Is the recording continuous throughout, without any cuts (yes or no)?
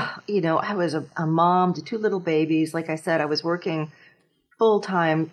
yes